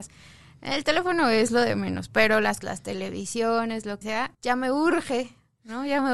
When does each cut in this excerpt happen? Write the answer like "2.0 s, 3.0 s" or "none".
2.6 s, 4.0 s, 4.3 s